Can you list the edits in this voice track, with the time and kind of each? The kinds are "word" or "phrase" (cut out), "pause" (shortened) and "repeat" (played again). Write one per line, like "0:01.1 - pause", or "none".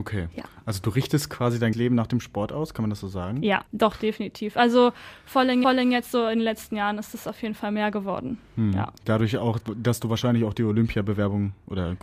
0:01.7 - word
0:03.7 - pause
0:05.6 - repeat
0:09.0 - pause